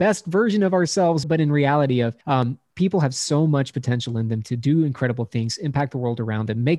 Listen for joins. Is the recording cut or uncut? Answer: cut